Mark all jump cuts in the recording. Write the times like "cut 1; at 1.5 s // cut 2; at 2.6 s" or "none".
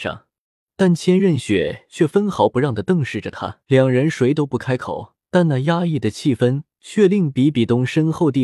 cut 1; at 3.6 s // cut 2; at 5.2 s